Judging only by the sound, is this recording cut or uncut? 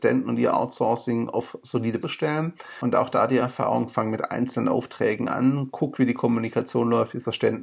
cut